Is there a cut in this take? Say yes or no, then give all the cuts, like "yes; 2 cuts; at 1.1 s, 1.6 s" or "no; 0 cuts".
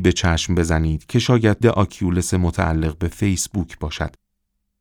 yes; 1 cut; at 1.6 s